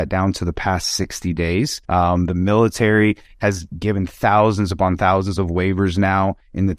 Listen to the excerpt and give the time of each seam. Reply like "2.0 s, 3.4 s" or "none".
1.8 s